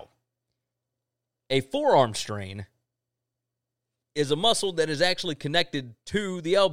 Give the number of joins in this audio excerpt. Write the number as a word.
zero